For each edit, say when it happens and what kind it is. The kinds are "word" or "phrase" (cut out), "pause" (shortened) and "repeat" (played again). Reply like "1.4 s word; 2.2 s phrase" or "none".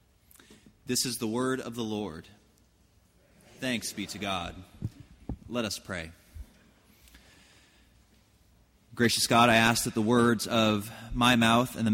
none